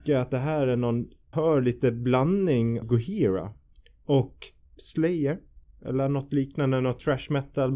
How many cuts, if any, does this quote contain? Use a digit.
3